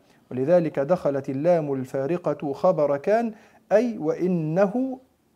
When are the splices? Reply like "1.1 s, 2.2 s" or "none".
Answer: none